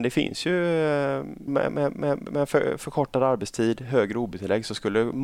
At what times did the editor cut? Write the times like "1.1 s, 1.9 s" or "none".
1.5 s, 2.0 s